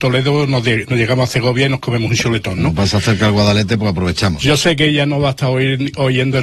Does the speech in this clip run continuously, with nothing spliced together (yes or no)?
yes